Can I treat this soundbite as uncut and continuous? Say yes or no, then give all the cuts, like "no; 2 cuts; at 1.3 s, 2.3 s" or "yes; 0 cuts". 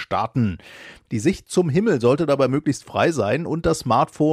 yes; 0 cuts